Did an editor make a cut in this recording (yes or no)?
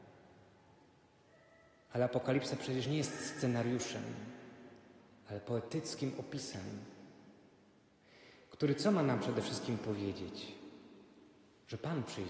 no